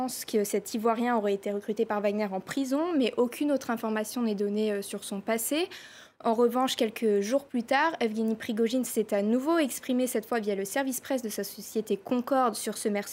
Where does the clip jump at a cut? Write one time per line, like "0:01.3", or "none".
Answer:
none